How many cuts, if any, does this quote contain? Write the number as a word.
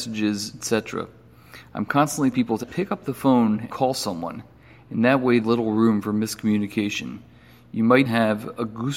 five